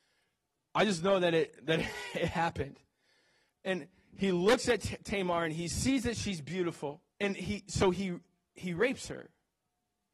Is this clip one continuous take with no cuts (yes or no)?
no